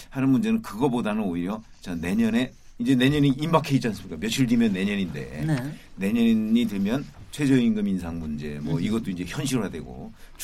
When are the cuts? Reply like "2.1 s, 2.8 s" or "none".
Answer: none